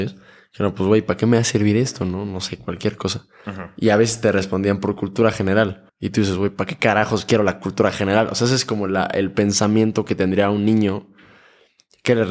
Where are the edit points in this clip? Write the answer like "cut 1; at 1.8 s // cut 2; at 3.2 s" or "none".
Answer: cut 1; at 5.9 s